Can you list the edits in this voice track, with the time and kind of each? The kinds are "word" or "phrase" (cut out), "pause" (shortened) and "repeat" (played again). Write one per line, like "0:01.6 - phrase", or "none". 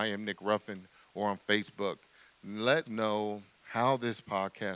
0:02.9 - word